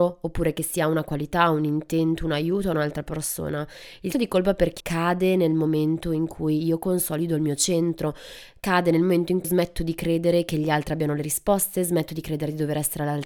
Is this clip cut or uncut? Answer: cut